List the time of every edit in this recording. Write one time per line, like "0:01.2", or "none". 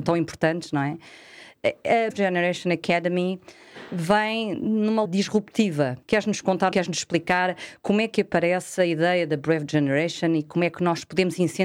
0:02.1
0:05.0
0:06.0
0:06.7